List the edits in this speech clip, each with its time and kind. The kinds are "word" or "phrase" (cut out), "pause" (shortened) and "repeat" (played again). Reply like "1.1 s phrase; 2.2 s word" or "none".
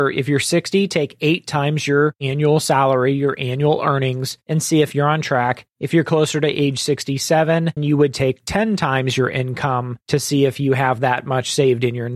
7.8 s word

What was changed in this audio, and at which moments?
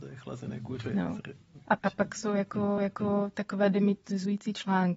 1.8 s word; 2.8 s repeat

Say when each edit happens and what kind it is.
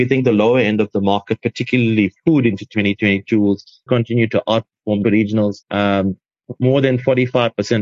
3.9 s word; 5.0 s phrase; 5.6 s pause

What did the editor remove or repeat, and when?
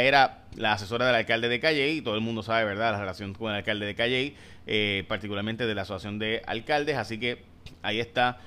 none

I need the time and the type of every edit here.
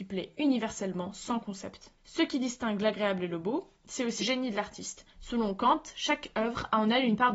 2.0 s pause; 4.2 s word; 5.1 s pause

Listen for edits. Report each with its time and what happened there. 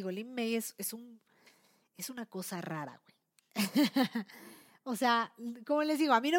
none

